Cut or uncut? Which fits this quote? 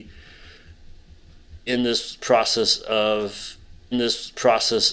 cut